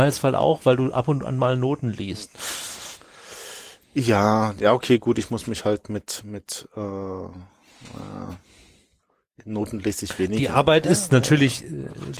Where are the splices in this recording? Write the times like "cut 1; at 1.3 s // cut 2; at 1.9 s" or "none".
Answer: none